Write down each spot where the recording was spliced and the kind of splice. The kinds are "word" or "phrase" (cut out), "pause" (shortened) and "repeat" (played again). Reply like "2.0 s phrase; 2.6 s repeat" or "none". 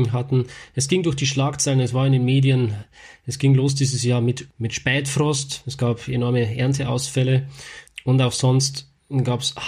none